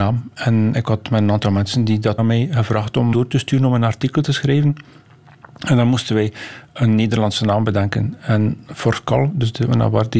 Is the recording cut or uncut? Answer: cut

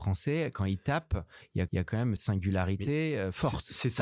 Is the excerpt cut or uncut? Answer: cut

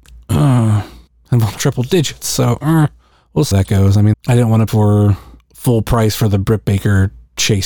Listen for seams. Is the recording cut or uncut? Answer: cut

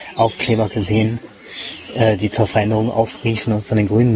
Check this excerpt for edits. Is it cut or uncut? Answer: uncut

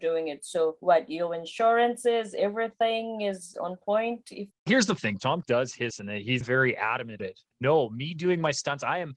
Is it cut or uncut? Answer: cut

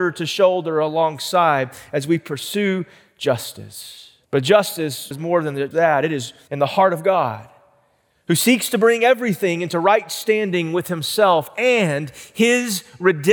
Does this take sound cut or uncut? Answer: cut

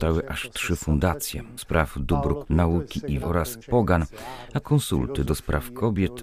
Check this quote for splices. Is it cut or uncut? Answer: cut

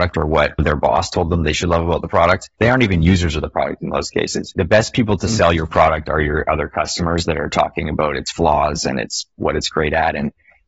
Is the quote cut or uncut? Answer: cut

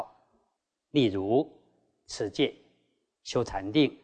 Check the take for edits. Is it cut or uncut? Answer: uncut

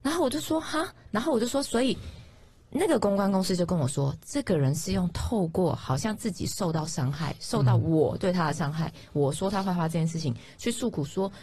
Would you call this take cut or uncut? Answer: uncut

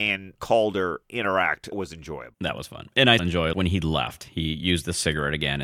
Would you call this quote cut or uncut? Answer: cut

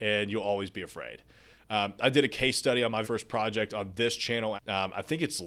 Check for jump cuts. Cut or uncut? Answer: cut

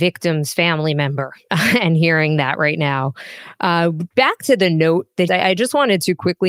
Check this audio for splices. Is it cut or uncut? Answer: cut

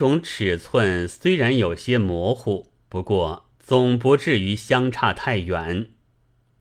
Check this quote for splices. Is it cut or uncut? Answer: cut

